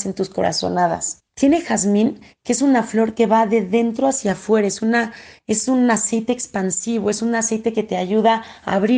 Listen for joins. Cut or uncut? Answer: cut